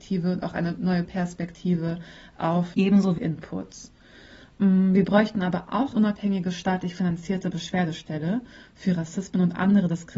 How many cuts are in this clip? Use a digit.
4